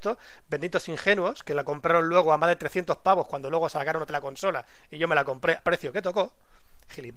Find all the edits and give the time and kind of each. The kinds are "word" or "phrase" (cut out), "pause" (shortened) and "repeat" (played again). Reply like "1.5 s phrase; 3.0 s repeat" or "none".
4.1 s word; 5.6 s word